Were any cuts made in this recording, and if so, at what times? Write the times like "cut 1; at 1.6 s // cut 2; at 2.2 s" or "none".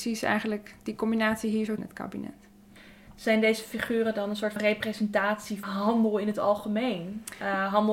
cut 1; at 1.8 s // cut 2; at 4.6 s // cut 3; at 5.6 s